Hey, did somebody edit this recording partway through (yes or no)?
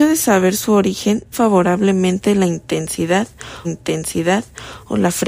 yes